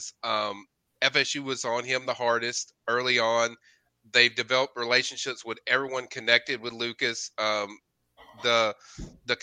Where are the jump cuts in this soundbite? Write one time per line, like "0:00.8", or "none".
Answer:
none